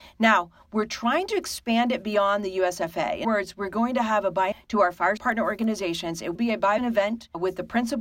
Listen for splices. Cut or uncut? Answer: cut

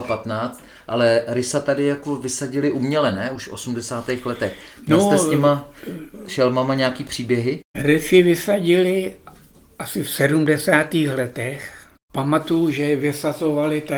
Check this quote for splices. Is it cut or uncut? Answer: uncut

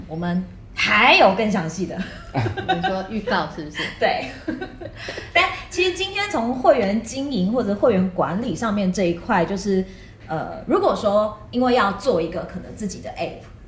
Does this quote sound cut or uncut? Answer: uncut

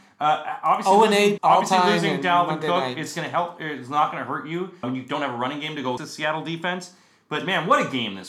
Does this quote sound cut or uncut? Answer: cut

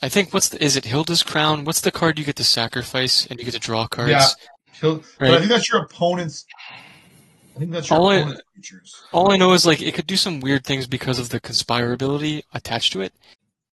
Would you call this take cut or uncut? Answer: uncut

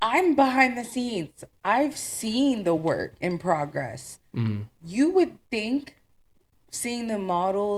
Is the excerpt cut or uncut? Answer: uncut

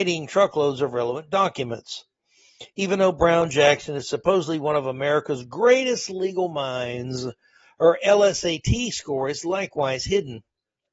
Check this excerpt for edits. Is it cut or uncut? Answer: uncut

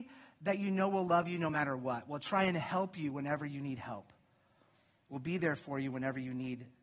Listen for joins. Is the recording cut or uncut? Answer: uncut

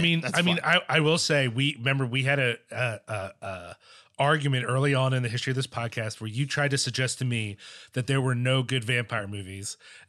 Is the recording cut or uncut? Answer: uncut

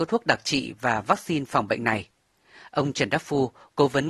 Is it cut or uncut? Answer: uncut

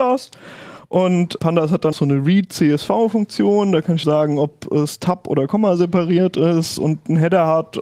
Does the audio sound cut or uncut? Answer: cut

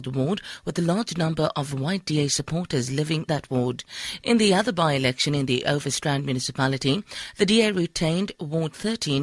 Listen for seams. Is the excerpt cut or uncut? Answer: cut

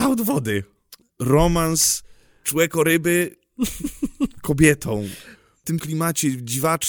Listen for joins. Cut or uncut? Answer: cut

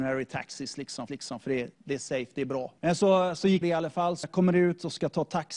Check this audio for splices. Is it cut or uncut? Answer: cut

